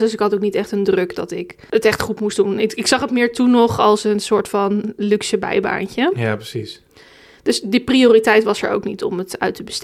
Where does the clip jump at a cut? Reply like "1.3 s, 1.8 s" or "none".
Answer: none